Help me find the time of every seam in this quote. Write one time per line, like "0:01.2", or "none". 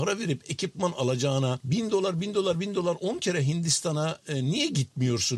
none